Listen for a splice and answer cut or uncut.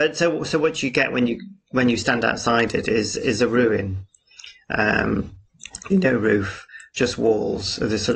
cut